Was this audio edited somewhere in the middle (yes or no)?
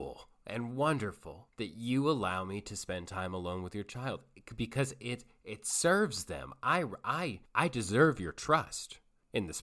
no